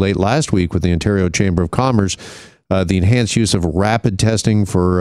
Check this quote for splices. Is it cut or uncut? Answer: uncut